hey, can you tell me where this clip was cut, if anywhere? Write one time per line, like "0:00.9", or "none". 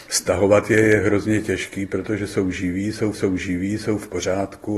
0:03.1